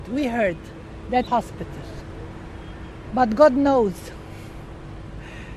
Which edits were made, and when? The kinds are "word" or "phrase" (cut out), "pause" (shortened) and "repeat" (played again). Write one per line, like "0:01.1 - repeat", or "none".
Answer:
0:01.3 - phrase